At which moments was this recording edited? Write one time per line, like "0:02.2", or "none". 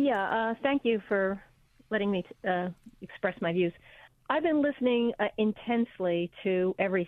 none